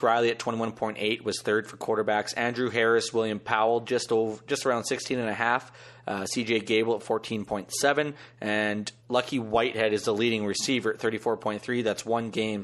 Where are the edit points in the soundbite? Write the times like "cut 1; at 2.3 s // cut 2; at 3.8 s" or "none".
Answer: cut 1; at 9.0 s